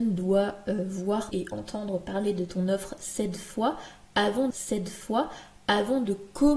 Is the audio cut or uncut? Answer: cut